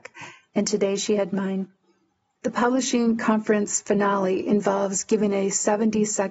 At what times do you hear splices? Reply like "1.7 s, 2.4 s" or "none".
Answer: none